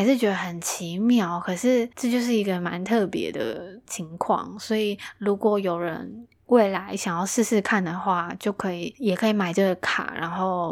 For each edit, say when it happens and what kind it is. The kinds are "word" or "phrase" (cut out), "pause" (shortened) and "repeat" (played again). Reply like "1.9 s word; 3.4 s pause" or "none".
none